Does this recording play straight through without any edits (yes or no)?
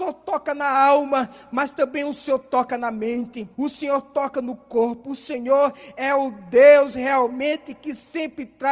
no